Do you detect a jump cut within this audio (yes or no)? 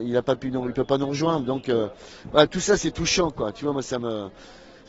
no